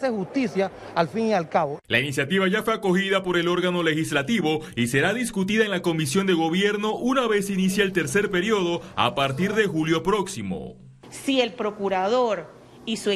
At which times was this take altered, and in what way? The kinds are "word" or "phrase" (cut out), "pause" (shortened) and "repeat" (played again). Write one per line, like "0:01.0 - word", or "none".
0:01.8 - pause

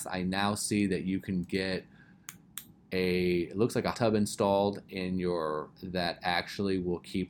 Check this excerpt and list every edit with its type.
0:03.9 - word
0:05.8 - word

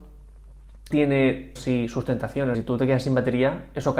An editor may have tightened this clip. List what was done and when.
0:00.9 - word
0:01.6 - phrase
0:02.5 - word

